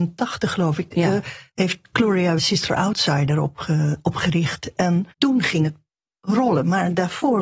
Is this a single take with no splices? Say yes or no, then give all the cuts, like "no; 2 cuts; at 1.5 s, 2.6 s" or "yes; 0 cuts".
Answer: no; 3 cuts; at 1.5 s, 2.4 s, 5.1 s